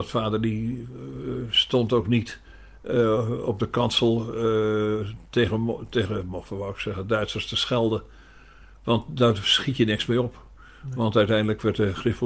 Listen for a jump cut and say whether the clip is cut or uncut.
uncut